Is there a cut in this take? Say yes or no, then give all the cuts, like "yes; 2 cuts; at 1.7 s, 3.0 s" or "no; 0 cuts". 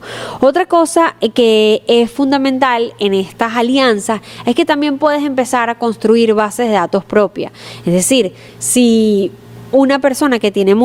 no; 0 cuts